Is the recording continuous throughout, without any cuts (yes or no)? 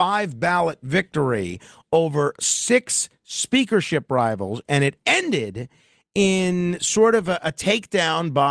yes